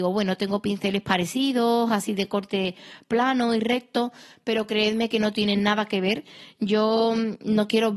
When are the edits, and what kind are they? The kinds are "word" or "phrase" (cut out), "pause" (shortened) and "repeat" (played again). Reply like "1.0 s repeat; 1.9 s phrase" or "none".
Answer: none